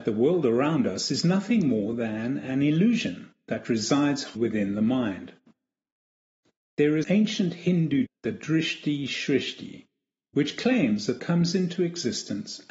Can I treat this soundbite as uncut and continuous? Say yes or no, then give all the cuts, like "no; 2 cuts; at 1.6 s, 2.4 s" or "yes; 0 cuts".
no; 4 cuts; at 4.4 s, 7.0 s, 8.1 s, 11.2 s